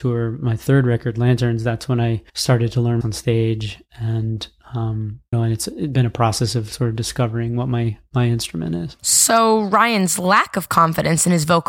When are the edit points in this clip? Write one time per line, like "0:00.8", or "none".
0:02.3
0:03.0
0:05.3
0:09.0